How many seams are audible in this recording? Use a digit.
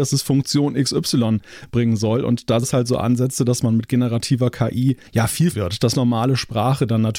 4